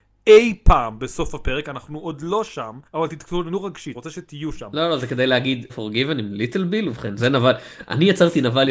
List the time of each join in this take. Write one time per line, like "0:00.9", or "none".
0:02.9
0:03.9
0:05.7
0:07.2